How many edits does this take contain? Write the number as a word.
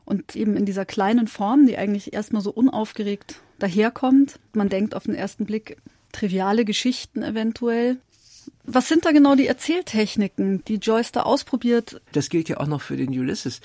two